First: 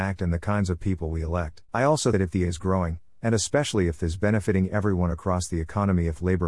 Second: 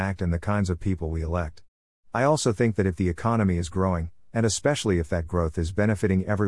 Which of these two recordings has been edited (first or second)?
first